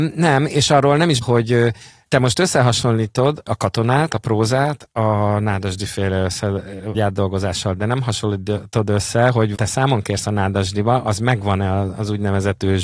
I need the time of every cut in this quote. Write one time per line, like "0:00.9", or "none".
0:01.2
0:06.9
0:09.5